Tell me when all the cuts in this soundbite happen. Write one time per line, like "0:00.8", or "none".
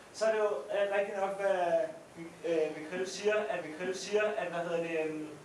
0:02.1
0:03.6